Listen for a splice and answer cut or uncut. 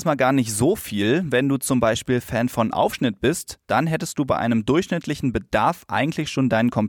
uncut